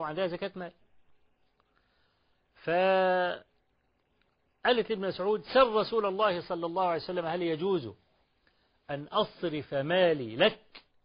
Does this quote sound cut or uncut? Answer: uncut